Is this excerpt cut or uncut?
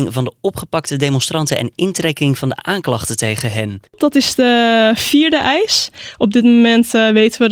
cut